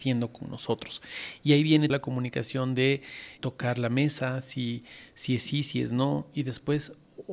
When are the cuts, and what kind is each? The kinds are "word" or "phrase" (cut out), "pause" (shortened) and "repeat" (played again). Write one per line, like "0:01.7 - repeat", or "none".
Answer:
0:01.9 - word
0:03.4 - word